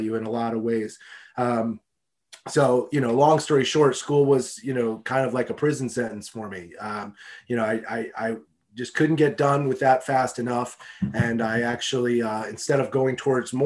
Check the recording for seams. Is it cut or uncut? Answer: uncut